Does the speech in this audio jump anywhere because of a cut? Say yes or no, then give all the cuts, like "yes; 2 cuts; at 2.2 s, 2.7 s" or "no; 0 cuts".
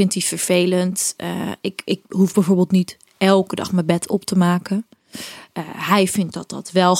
no; 0 cuts